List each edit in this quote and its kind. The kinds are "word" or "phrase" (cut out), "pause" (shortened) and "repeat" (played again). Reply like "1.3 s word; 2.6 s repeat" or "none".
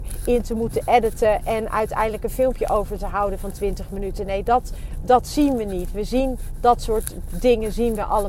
none